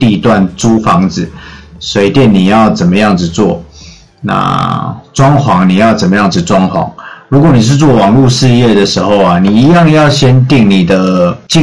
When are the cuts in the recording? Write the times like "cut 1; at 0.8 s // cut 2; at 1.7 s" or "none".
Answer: none